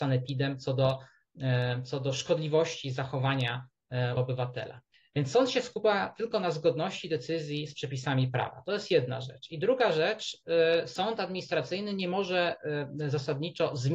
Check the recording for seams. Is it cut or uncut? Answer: cut